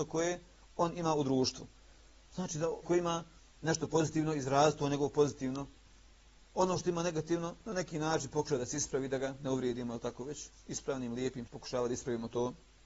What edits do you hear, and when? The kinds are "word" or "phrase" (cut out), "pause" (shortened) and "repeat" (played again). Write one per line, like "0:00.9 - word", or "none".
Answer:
0:02.8 - word
0:11.5 - phrase